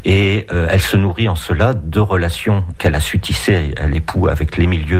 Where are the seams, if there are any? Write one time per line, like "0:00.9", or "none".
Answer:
0:02.8
0:03.9